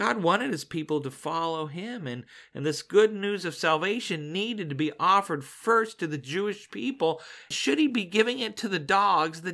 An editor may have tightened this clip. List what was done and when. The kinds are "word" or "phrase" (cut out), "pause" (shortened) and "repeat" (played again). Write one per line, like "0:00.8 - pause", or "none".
none